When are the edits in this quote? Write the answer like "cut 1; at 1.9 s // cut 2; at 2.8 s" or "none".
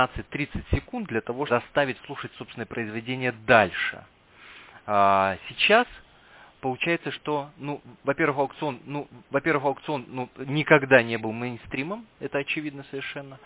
cut 1; at 1.5 s // cut 2; at 8.8 s